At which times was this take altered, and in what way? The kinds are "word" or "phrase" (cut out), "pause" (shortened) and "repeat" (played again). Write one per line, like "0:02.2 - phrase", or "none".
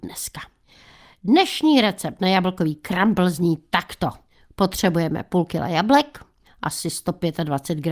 none

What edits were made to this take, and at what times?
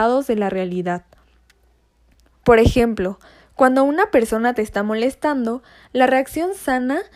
none

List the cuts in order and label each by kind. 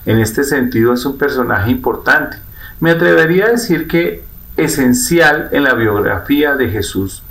none

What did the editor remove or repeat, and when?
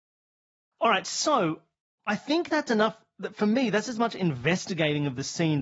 none

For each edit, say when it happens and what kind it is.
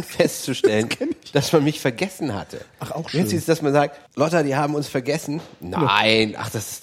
0:04.1 - pause

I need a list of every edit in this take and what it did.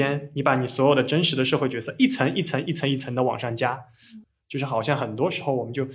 none

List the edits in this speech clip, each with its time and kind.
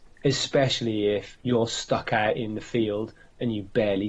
0:01.4 - pause

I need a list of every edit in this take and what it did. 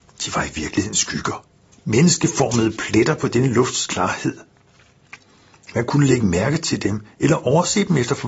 none

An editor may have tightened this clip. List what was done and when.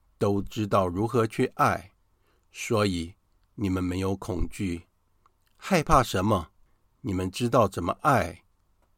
none

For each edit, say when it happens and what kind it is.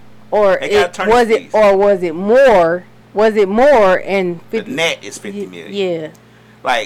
0:03.0 - pause

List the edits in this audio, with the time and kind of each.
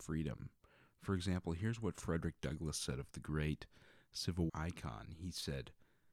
0:03.1 - word
0:04.5 - word

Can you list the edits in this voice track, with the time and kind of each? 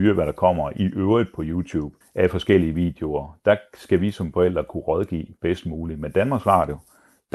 0:02.0 - pause

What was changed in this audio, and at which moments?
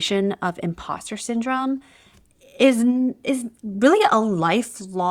none

